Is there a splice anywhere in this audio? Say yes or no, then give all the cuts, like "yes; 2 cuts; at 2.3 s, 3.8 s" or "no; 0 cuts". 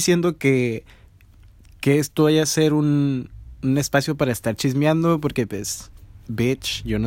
no; 0 cuts